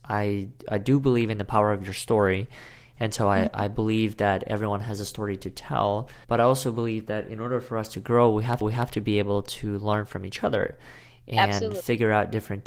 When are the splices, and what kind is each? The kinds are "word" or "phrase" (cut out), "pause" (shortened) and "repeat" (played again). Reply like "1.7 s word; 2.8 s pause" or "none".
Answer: 6.2 s pause; 8.6 s repeat